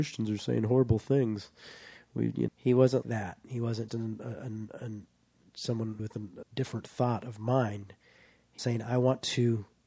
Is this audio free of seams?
no; 6 cuts; at 2.5 s, 3.0 s, 3.9 s, 6.0 s, 6.4 s, 8.6 s

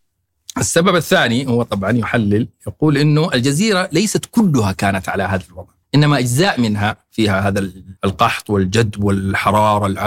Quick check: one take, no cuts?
no; 2 cuts; at 5.8 s, 8.0 s

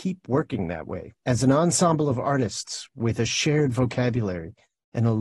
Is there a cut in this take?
yes; 1 cut; at 1.2 s

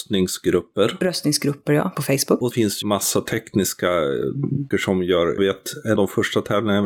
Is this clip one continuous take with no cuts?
no; 6 cuts; at 1.9 s, 2.5 s, 2.8 s, 4.7 s, 5.4 s, 6.0 s

